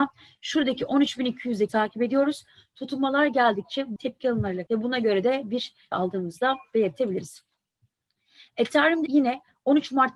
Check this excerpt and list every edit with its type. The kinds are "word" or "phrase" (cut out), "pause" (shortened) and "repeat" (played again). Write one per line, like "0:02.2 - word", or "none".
0:01.7 - word
0:04.0 - word
0:04.7 - word
0:05.9 - word
0:09.1 - word